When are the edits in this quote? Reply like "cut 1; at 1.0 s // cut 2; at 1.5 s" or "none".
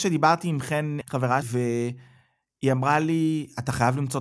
cut 1; at 1.0 s // cut 2; at 1.4 s